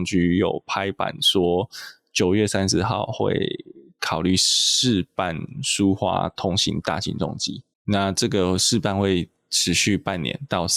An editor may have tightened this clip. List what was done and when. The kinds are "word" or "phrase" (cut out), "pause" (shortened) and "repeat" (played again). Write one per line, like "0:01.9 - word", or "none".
0:07.7 - pause